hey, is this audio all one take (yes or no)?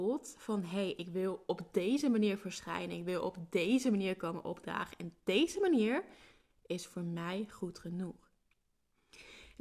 yes